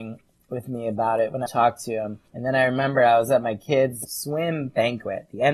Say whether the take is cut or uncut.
cut